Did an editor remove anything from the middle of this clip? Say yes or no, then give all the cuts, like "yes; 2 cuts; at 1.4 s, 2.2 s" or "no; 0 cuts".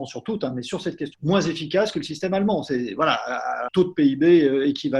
yes; 2 cuts; at 1.1 s, 3.7 s